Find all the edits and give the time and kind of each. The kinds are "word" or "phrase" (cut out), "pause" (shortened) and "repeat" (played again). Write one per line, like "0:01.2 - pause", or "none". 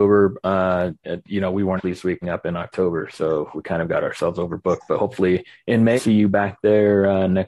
0:01.8 - word
0:02.2 - word
0:03.5 - word
0:06.0 - word